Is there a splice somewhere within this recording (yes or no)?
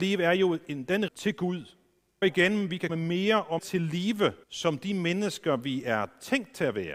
yes